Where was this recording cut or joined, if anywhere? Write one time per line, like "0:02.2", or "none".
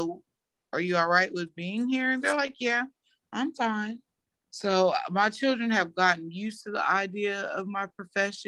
0:04.2